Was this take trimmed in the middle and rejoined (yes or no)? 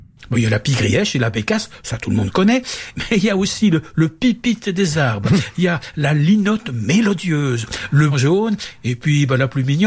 yes